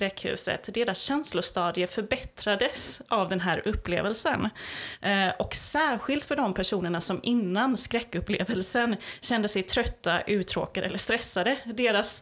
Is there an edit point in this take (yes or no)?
no